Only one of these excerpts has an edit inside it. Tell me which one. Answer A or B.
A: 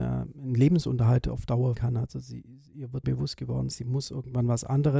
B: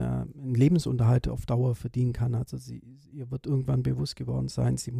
A